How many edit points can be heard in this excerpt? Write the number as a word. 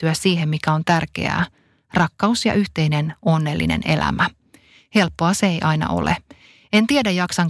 zero